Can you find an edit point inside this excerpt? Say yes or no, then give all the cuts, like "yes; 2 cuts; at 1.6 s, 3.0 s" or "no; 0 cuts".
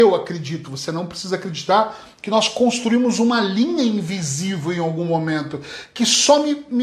no; 0 cuts